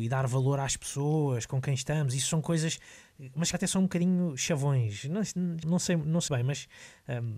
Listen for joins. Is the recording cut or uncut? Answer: cut